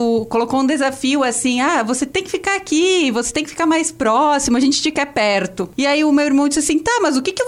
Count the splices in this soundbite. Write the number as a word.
zero